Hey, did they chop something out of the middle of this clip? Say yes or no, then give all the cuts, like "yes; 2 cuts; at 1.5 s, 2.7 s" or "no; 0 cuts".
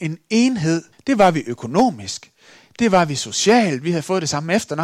yes; 1 cut; at 0.9 s